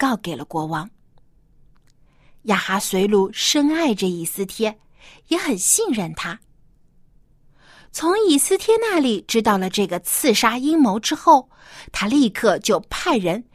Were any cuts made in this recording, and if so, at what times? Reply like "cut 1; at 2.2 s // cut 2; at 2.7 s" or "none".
none